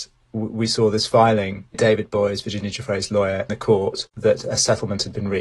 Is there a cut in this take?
yes; 3 cuts; at 1.7 s, 3.5 s, 4.1 s

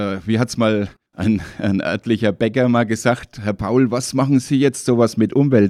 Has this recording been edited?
no; 0 cuts

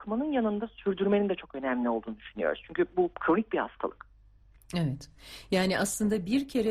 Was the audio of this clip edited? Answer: no; 0 cuts

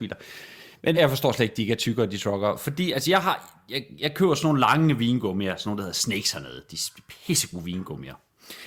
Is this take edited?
yes; 1 cut; at 0.9 s

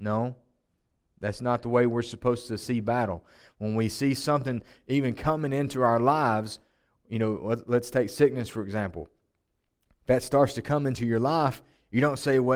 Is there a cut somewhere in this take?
no; 0 cuts

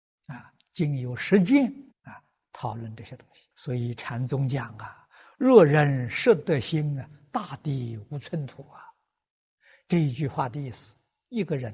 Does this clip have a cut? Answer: yes; 2 cuts; at 1.9 s, 3.5 s

